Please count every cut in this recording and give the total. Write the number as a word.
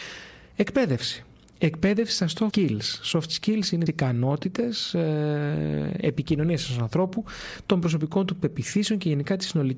two